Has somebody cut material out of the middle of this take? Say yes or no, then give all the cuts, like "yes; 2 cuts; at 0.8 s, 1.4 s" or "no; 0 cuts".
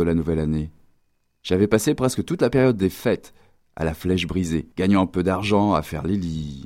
yes; 1 cut; at 4.7 s